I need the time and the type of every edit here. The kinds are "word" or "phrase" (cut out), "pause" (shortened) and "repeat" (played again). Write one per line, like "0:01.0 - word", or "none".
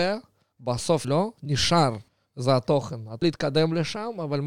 0:01.0 - phrase
0:02.1 - pause
0:03.2 - word